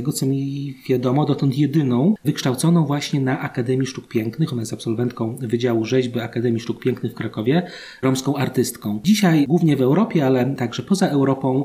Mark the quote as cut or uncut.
uncut